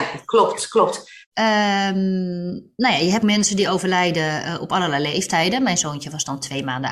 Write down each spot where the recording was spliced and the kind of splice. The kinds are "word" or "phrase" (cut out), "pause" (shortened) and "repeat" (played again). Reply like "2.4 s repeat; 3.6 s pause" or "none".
1.2 s pause; 3.2 s word